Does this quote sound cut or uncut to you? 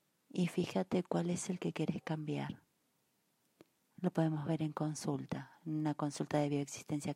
uncut